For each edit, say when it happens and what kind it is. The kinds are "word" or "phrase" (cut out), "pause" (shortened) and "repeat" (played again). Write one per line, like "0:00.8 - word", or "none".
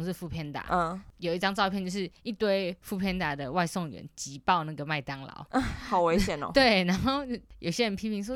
none